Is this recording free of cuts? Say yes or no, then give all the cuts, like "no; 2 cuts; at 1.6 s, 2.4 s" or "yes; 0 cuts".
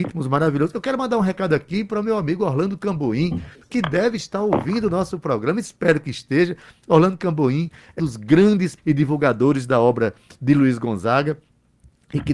no; 2 cuts; at 8.0 s, 8.8 s